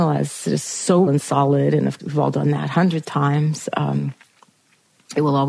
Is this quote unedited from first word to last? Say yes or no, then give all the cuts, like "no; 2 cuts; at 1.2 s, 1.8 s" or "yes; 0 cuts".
no; 3 cuts; at 1.1 s, 2.0 s, 3.0 s